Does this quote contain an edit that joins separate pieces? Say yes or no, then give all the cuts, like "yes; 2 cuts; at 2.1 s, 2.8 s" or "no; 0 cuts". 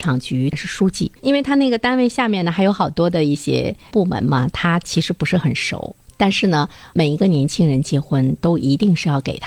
yes; 1 cut; at 1.2 s